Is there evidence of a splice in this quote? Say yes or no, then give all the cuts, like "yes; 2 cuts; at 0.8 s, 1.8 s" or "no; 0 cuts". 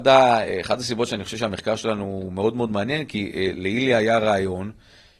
no; 0 cuts